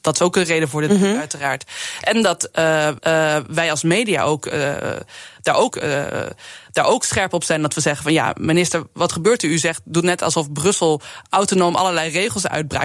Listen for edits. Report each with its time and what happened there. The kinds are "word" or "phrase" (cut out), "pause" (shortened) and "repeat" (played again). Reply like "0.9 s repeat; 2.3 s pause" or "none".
3.0 s repeat; 5.7 s repeat